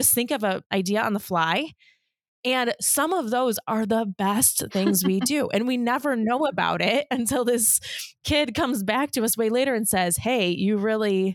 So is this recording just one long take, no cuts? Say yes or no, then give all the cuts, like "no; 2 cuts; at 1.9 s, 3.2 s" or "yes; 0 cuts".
yes; 0 cuts